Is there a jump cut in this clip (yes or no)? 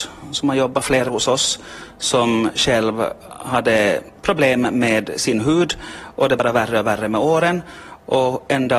yes